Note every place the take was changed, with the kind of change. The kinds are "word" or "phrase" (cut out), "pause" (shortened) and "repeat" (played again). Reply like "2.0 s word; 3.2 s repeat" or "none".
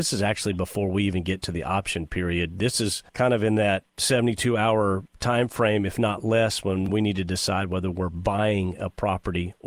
3.1 s pause; 3.9 s pause; 5.1 s pause